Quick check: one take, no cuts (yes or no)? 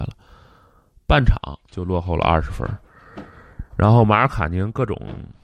no